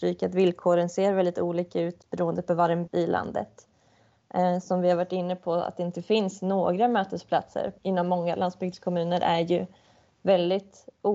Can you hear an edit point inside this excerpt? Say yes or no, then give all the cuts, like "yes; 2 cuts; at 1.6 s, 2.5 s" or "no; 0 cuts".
yes; 2 cuts; at 2.9 s, 7.8 s